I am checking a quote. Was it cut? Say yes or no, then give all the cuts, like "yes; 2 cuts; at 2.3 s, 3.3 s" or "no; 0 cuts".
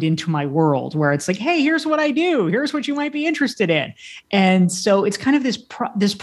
no; 0 cuts